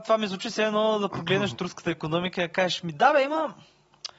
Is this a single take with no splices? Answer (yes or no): yes